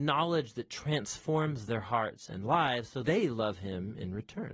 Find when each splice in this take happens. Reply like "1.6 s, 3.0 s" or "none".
3.0 s